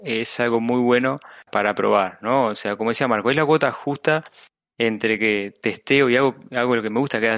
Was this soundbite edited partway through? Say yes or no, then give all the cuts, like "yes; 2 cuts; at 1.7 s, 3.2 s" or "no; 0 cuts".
yes; 1 cut; at 1.5 s